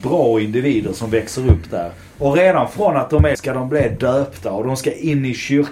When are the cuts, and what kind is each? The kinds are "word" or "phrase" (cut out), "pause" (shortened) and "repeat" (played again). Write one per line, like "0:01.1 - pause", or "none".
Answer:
0:03.3 - phrase